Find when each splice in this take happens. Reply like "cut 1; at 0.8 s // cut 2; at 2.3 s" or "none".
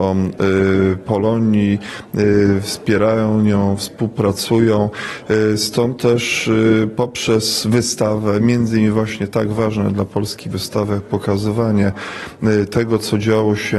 none